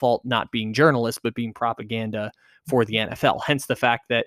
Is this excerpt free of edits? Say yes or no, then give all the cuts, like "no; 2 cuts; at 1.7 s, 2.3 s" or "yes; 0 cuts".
yes; 0 cuts